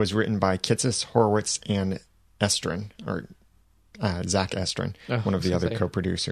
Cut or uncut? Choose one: uncut